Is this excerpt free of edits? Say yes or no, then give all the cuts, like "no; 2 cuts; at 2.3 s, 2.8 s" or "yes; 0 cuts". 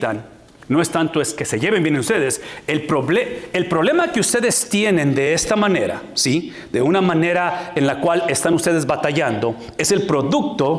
yes; 0 cuts